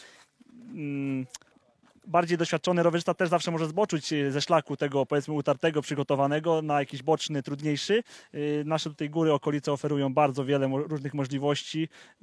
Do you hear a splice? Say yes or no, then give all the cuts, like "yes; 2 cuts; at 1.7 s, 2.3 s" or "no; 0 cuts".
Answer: yes; 1 cut; at 1.5 s